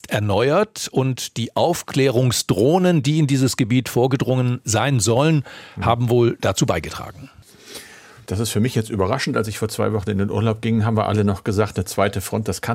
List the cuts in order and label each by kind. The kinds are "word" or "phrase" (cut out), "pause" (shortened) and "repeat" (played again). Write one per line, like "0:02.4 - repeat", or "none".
none